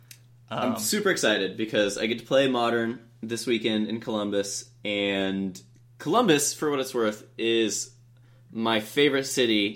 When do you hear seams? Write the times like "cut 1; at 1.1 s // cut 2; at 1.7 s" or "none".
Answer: none